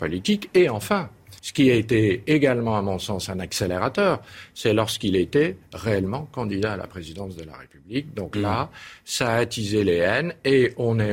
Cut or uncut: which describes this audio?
cut